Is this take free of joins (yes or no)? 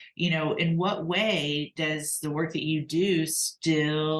yes